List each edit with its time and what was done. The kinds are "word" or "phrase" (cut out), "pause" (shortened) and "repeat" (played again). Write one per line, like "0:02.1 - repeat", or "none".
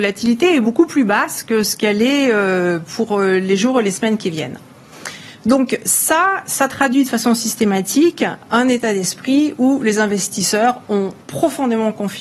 0:11.2 - pause

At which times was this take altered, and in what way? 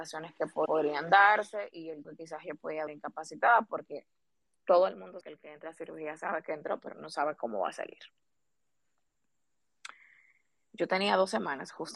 0:02.0 - word
0:02.9 - word
0:05.2 - word

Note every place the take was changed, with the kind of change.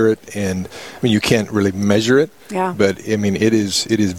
0:02.4 - pause

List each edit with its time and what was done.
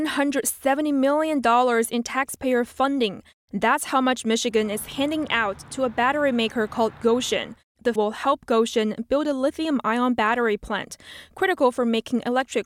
0:08.0 - word

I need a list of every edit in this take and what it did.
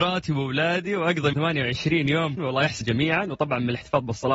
0:01.3 - word
0:02.4 - word
0:02.8 - word

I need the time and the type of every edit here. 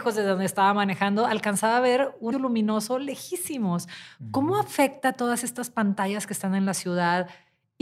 0:02.3 - word

